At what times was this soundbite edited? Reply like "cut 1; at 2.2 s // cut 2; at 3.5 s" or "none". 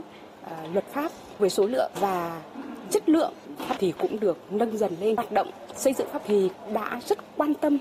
cut 1; at 1.4 s // cut 2; at 3.8 s // cut 3; at 6.2 s